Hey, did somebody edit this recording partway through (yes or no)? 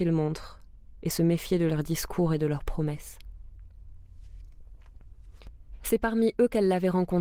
no